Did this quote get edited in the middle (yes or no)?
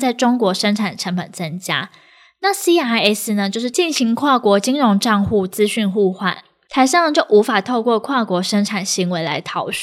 no